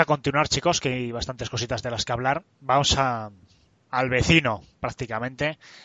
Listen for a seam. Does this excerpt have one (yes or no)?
yes